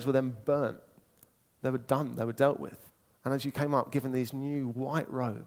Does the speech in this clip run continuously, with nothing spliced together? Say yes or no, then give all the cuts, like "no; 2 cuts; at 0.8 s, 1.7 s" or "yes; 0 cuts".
no; 1 cut; at 2.9 s